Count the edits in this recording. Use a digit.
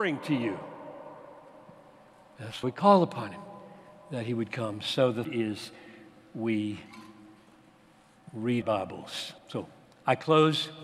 4